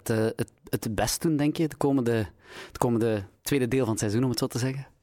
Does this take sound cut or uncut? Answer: uncut